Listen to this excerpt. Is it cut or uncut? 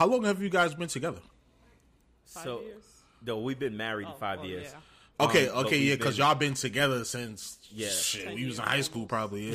uncut